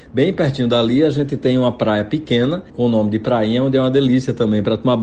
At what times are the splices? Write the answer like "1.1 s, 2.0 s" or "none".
2.7 s